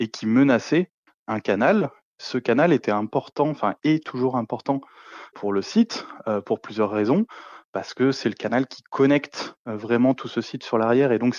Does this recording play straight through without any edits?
yes; 0 cuts

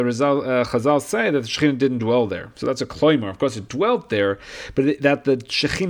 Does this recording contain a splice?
no; 0 cuts

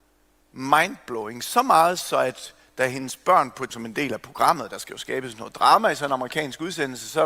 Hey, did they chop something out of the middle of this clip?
yes; 1 cut; at 3.7 s

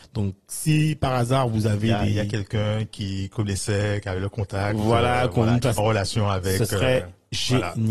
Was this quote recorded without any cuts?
no; 1 cut; at 5.8 s

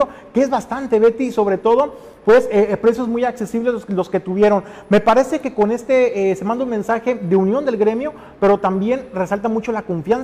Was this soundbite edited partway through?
no; 0 cuts

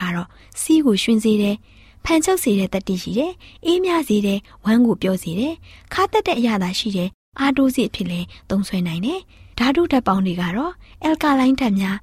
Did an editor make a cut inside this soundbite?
no; 0 cuts

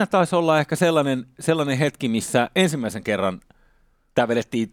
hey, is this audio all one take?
yes; 0 cuts

